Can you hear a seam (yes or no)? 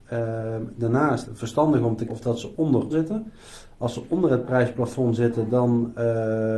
yes